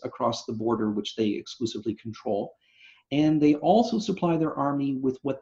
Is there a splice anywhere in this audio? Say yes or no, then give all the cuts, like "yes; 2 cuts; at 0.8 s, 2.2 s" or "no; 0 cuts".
no; 0 cuts